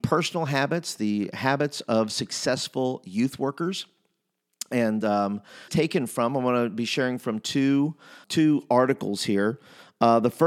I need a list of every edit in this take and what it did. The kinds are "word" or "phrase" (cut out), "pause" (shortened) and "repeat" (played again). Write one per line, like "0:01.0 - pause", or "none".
0:05.7 - phrase
0:08.2 - word